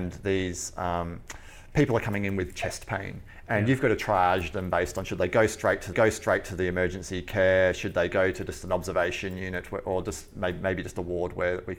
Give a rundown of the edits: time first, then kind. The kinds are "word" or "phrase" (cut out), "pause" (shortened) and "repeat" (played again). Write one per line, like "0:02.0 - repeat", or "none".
0:05.9 - repeat